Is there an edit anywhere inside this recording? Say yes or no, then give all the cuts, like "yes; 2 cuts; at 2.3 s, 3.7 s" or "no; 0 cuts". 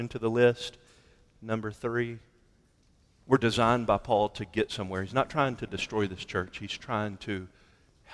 no; 0 cuts